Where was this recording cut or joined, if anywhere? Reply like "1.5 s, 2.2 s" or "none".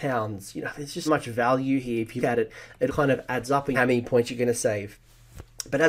1.1 s, 2.2 s, 2.9 s, 3.7 s